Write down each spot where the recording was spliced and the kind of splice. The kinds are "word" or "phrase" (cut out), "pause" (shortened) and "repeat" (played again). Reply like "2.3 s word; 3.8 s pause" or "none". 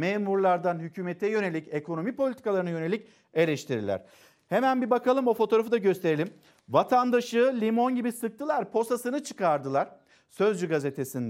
none